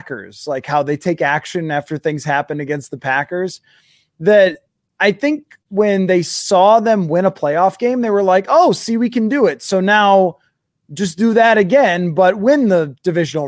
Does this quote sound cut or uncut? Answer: uncut